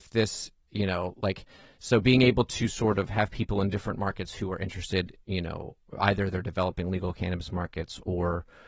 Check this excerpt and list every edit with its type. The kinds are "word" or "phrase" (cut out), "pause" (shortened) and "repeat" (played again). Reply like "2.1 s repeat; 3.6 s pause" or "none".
none